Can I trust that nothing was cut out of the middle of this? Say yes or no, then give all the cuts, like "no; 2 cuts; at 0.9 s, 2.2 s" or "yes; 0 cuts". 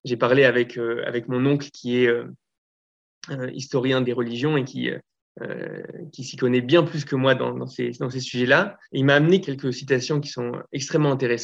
no; 3 cuts; at 4.0 s, 8.8 s, 9.4 s